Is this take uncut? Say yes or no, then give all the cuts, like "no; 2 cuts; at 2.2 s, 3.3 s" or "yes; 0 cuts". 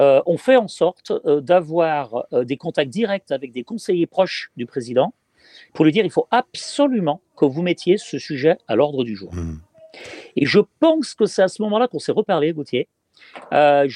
yes; 0 cuts